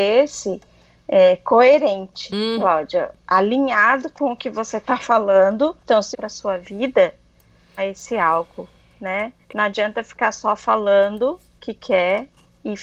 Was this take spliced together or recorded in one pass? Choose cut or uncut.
cut